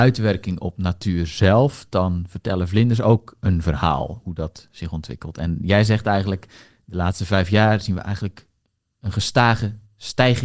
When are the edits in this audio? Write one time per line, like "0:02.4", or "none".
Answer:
none